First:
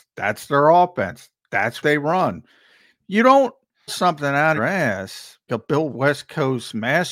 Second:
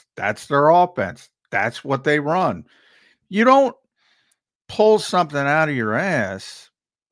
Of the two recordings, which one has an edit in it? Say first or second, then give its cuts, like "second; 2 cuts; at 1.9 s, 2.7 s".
first; 5 cuts; at 1.8 s, 3.9 s, 4.6 s, 5.5 s, 5.9 s